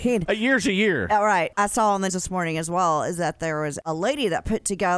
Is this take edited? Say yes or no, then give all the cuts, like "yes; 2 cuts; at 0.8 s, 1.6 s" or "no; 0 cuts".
yes; 3 cuts; at 1.5 s, 2.1 s, 3.8 s